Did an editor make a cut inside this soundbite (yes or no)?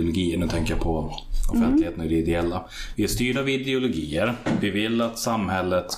no